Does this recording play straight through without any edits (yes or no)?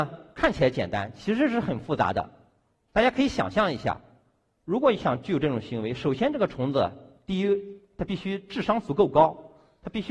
yes